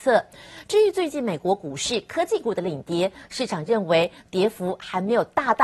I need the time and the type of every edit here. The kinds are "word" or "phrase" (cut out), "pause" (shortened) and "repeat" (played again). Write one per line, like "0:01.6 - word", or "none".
none